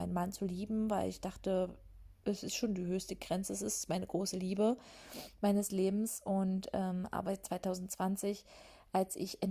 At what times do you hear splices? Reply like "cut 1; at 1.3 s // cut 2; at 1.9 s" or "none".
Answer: none